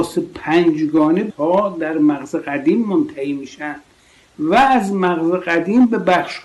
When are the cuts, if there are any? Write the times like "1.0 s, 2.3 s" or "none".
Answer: 1.3 s